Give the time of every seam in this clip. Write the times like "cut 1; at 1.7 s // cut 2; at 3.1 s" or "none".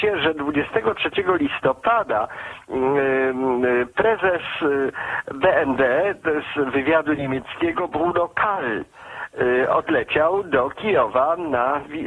none